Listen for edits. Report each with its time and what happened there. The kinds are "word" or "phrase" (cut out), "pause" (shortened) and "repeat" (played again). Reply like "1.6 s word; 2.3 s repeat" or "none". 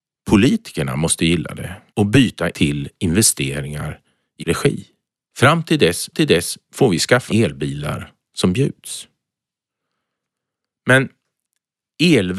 1.9 s pause; 2.5 s word; 4.4 s word; 5.0 s pause; 6.1 s repeat; 7.3 s word